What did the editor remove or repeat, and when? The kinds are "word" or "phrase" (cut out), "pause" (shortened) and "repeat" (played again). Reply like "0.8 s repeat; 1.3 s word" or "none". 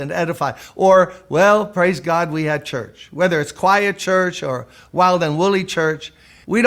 none